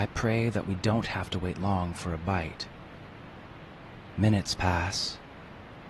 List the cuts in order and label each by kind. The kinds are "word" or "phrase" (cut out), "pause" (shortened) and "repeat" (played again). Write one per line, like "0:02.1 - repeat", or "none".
none

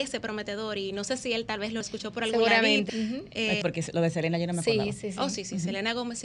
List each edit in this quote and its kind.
0:01.8 - phrase
0:02.9 - word
0:03.6 - phrase

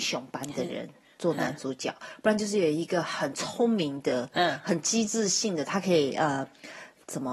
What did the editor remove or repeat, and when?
none

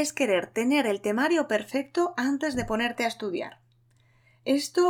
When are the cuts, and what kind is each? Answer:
none

